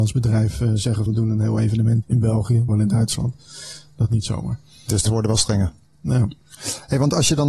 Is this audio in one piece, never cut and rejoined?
no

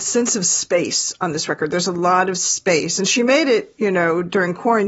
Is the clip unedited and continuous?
yes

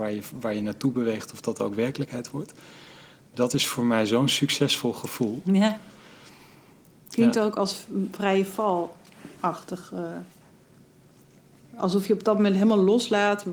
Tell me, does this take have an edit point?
no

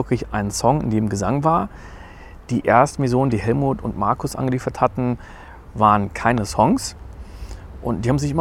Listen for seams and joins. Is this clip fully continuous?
yes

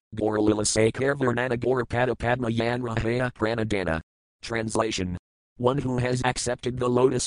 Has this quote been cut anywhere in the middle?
no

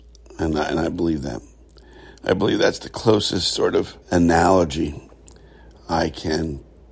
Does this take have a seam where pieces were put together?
yes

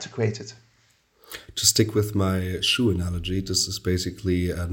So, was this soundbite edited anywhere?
no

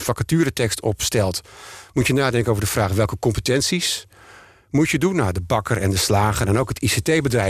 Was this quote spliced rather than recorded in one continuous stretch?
no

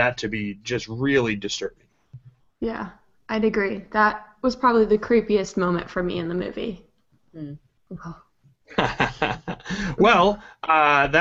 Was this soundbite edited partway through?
no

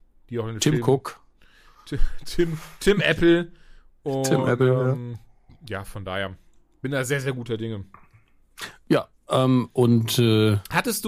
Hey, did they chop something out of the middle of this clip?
no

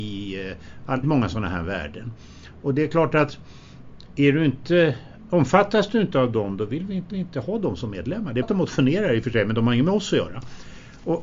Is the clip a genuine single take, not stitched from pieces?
no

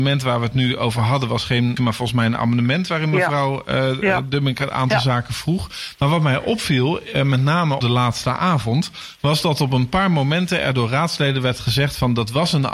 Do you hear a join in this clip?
yes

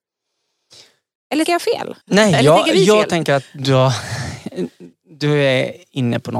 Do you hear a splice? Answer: yes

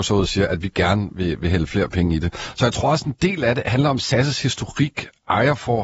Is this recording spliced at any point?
no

